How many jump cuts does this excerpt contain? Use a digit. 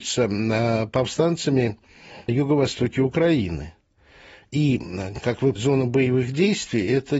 2